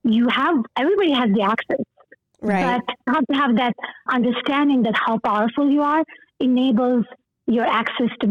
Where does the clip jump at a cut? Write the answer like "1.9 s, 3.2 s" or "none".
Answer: 3.1 s, 4.1 s